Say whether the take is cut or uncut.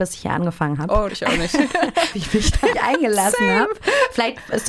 cut